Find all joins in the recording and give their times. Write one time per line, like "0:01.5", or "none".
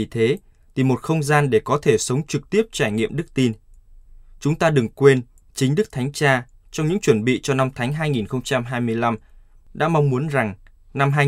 none